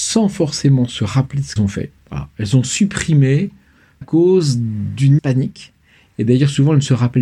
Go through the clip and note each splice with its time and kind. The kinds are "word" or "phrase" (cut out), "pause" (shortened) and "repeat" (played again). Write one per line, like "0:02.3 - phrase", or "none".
0:01.6 - word
0:02.0 - pause
0:04.0 - word
0:05.2 - word

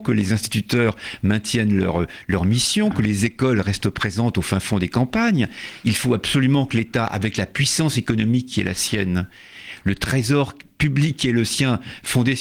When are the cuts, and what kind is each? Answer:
none

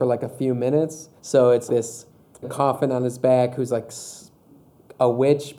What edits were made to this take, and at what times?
0:01.2 - pause
0:01.7 - word
0:02.4 - phrase

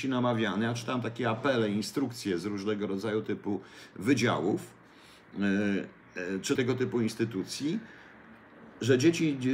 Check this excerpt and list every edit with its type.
0:03.2 - word
0:06.6 - word

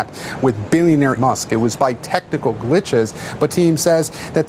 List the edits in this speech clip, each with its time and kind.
0:01.2 - word
0:01.8 - word
0:03.5 - word

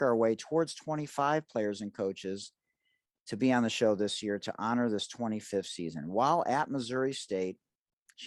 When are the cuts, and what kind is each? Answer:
none

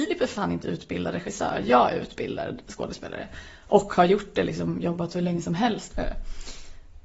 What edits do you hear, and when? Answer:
none

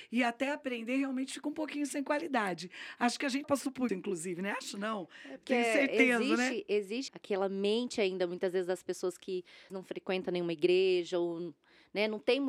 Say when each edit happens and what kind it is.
0:03.4 - word
0:03.9 - word
0:07.1 - word
0:09.7 - word

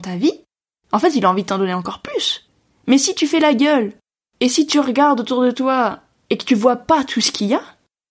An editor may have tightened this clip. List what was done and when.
none

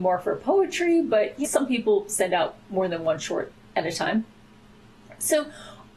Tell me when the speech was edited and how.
0:01.4 - word

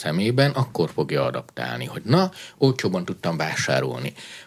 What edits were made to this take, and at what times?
none

